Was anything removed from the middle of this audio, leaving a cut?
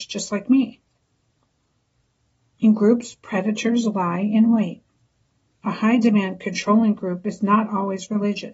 no; 0 cuts

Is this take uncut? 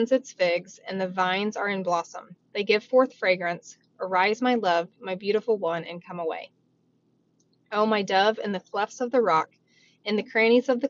yes; 0 cuts

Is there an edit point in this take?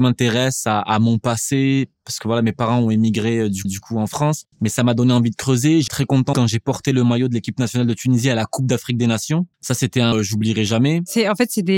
yes; 6 cuts; at 3.6 s, 4.5 s, 5.9 s, 6.3 s, 9.5 s, 10.1 s

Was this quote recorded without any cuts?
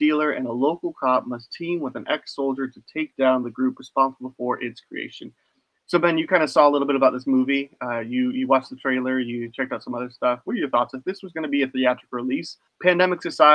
yes; 0 cuts

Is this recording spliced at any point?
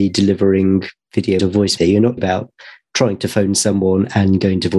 yes; 3 cuts; at 1.4 s, 1.8 s, 2.2 s

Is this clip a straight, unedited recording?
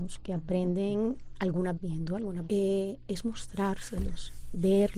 no; 2 cuts; at 1.8 s, 2.5 s

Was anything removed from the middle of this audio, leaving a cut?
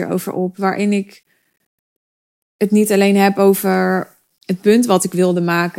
no; 0 cuts

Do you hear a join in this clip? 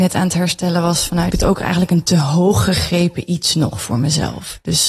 yes; 1 cut; at 1.3 s

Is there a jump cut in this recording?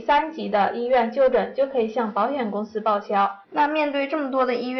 yes; 1 cut; at 3.4 s

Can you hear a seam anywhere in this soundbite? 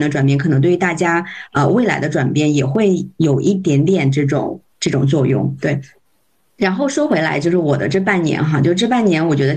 no; 0 cuts

